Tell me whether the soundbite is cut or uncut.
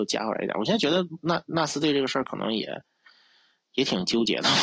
uncut